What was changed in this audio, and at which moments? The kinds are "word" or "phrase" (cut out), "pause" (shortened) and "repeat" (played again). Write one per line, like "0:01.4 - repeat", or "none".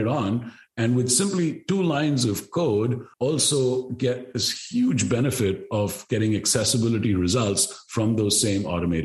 0:03.1 - pause